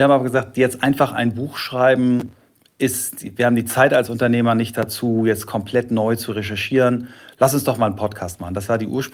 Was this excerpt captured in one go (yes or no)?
yes